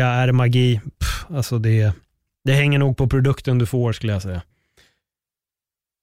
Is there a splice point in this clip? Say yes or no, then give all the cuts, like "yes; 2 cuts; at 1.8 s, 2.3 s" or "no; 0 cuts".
no; 0 cuts